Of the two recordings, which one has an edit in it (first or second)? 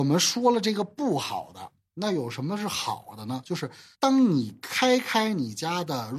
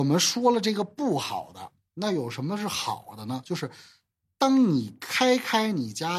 first